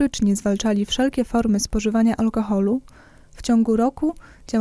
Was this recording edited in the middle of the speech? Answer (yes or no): no